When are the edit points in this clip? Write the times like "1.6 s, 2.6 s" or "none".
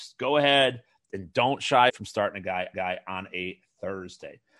1.9 s, 2.7 s